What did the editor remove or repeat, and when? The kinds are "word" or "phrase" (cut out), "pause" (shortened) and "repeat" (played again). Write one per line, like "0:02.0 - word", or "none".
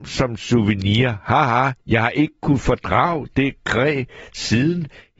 none

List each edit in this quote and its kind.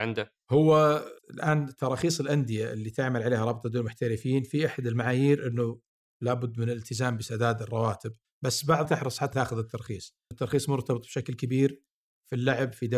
0:01.2 - pause
0:08.2 - pause
0:08.8 - phrase
0:09.3 - word
0:10.3 - word

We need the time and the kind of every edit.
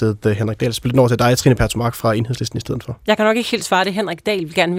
none

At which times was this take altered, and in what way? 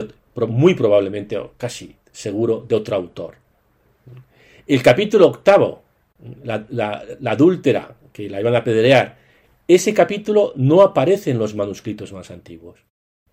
none

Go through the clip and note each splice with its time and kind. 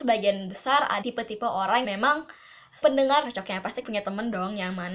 0:01.0 - word
0:01.8 - word
0:02.8 - word
0:03.2 - word
0:03.8 - word

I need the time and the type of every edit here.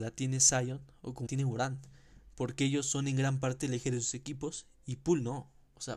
0:01.3 - word

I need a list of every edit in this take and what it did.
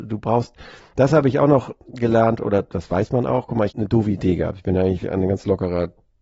0:03.7 - word

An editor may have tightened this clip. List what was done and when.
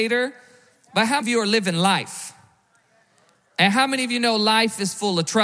0:01.2 - word

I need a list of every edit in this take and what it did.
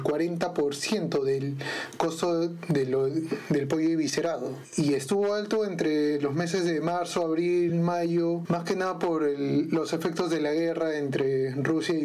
none

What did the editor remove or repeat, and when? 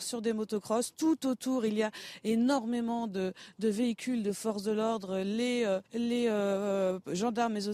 0:05.9 - pause

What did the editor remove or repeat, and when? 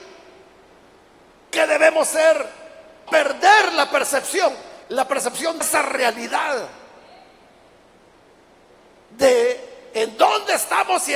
0:03.1 - phrase
0:04.8 - pause
0:05.6 - word

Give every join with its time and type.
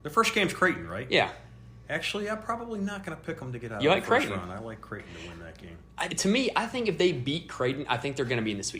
0:06.1 - phrase

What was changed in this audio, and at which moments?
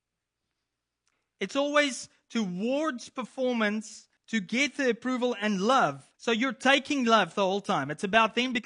0:04.2 - pause
0:06.1 - pause

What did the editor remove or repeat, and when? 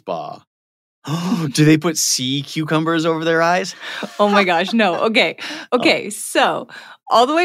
none

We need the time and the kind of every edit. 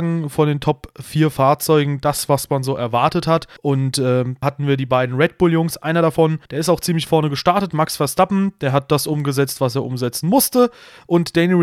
0:03.6 - pause
0:04.4 - word
0:06.5 - pause
0:07.1 - word

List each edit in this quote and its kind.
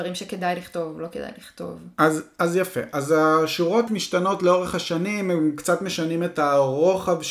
0:03.9 - phrase

